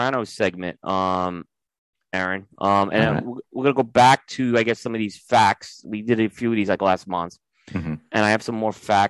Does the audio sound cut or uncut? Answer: uncut